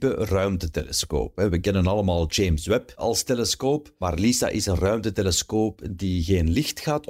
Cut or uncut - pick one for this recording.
uncut